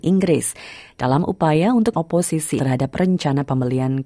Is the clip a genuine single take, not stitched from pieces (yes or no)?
no